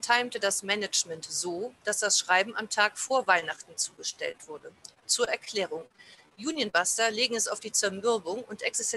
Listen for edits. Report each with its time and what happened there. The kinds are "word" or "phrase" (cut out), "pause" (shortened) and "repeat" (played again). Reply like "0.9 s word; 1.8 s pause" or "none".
none